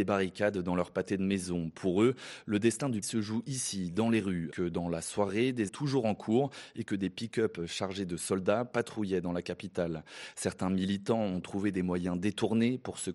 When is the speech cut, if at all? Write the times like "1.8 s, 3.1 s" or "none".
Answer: 3.0 s, 4.5 s, 5.7 s